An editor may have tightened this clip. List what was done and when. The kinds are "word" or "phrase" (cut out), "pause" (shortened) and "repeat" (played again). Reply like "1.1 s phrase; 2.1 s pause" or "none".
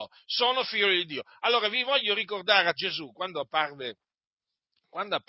2.7 s phrase

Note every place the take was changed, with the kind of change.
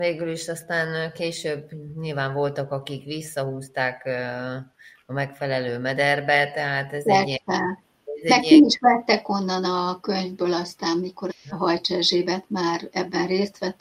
11.3 s word

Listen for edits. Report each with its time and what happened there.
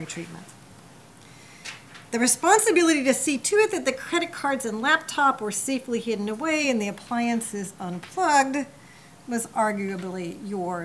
none

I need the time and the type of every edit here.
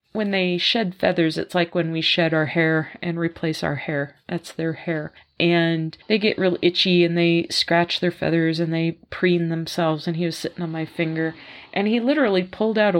6.0 s pause

